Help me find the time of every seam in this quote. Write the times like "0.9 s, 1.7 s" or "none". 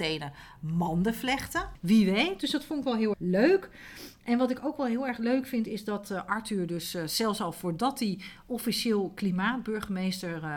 3.1 s